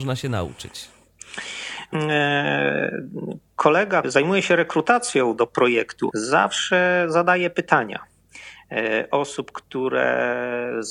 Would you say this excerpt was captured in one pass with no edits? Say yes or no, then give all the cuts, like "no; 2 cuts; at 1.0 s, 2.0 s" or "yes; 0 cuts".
no; 4 cuts; at 1.9 s, 4.0 s, 5.4 s, 6.1 s